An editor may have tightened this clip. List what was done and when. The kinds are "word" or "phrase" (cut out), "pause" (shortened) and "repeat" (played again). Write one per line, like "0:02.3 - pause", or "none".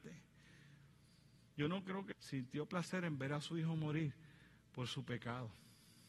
0:02.1 - word